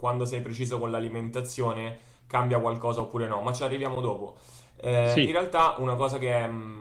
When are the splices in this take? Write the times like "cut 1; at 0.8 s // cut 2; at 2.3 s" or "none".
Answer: none